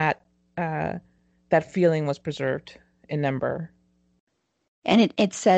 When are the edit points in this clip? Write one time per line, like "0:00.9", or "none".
none